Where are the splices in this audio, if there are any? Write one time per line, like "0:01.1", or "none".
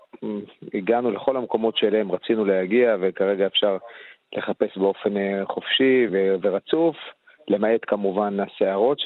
0:06.1